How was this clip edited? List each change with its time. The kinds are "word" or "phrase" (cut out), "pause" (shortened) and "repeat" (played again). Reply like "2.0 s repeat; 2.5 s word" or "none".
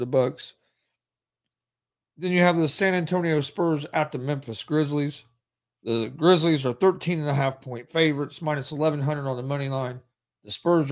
none

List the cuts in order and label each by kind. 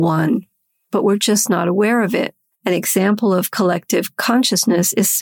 none

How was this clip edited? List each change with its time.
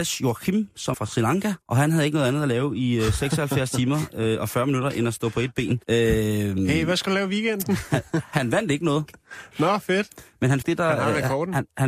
0.9 s word; 1.6 s pause; 5.8 s pause; 10.6 s word

